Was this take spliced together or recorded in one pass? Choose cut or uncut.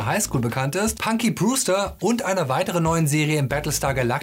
uncut